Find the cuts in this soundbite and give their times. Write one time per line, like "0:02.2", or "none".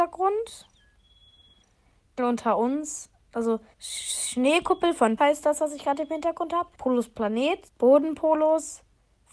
0:02.2
0:03.7
0:05.2
0:06.7
0:07.7